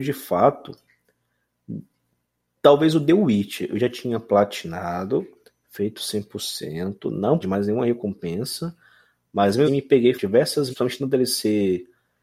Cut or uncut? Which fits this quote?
cut